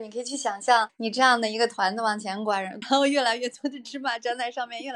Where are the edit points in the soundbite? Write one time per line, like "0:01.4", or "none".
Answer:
0:02.8